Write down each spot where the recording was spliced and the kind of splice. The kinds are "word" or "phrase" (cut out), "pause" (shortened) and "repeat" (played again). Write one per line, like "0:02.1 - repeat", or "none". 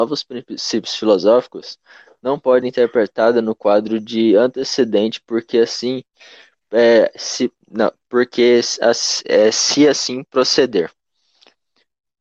0:02.6 - word